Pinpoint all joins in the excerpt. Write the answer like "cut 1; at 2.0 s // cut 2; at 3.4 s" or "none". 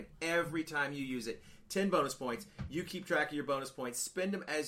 none